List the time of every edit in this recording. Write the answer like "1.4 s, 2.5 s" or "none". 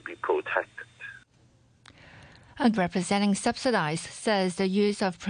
2.7 s, 4.0 s